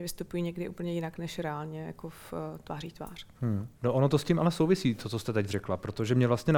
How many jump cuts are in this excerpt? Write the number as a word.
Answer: one